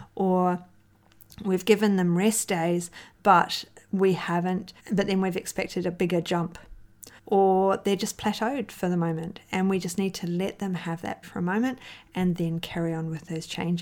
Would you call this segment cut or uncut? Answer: cut